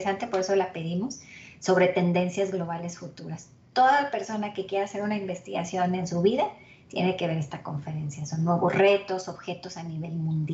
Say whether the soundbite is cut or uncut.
uncut